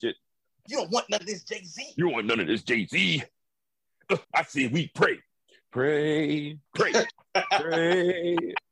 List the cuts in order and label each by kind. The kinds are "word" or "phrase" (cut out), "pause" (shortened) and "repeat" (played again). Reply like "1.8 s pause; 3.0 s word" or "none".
4.2 s pause; 6.7 s pause